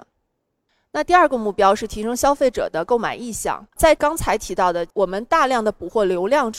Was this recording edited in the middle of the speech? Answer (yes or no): yes